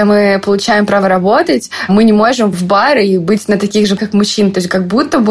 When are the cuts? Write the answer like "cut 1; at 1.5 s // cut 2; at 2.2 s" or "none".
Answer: cut 1; at 2.5 s // cut 2; at 4.0 s